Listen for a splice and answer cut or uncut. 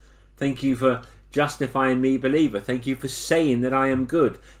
uncut